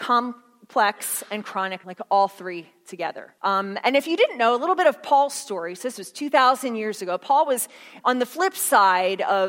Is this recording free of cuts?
no; 3 cuts; at 1.8 s, 3.4 s, 8.0 s

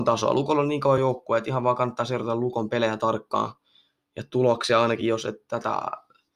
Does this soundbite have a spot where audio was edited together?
no; 0 cuts

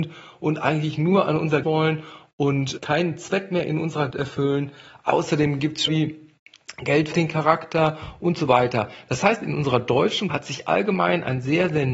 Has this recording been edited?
yes; 6 cuts; at 1.6 s, 2.8 s, 4.1 s, 5.9 s, 7.1 s, 10.3 s

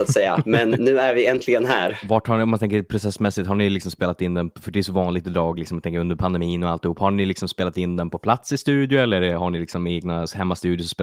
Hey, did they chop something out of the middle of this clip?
no; 0 cuts

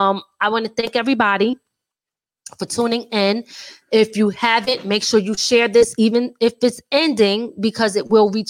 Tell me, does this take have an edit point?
no; 0 cuts

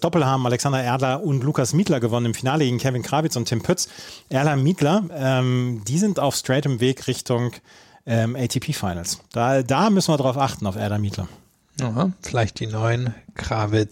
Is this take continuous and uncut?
yes; 0 cuts

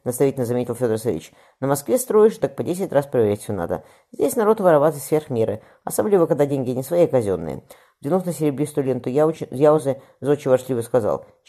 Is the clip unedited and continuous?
yes; 0 cuts

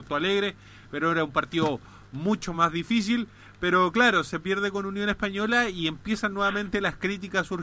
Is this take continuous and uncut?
yes; 0 cuts

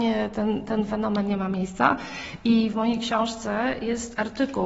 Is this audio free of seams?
no; 1 cut; at 2.7 s

